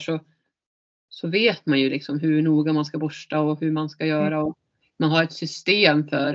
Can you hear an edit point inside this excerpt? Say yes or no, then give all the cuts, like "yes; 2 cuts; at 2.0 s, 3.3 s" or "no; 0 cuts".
no; 0 cuts